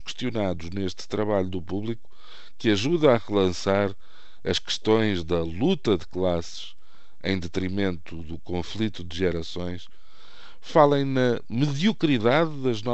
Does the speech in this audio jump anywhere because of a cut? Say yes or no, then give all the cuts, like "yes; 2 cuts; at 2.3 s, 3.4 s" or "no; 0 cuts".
no; 0 cuts